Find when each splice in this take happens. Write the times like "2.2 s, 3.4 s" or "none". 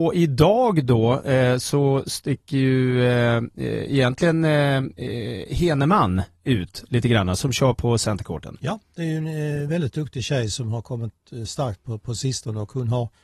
none